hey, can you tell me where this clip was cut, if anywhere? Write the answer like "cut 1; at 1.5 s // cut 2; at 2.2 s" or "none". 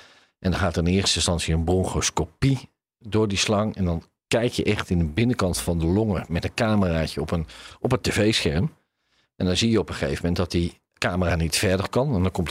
none